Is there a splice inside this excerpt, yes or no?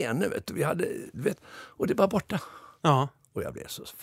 no